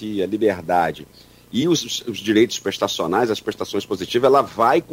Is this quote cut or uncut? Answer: uncut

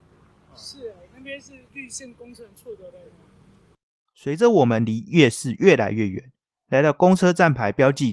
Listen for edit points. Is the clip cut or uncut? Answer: cut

